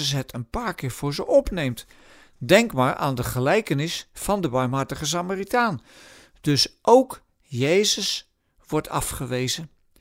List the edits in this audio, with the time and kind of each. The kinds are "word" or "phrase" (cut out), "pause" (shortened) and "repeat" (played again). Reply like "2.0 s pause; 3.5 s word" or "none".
none